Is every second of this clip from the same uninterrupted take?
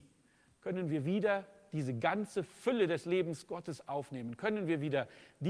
yes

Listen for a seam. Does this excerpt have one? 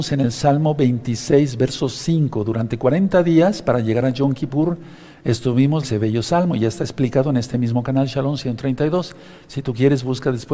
yes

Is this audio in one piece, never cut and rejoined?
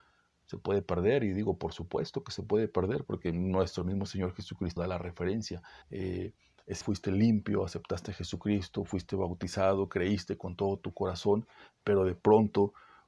no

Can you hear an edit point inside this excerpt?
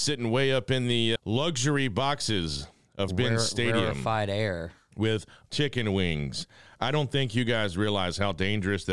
yes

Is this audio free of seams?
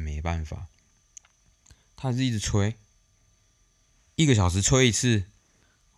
yes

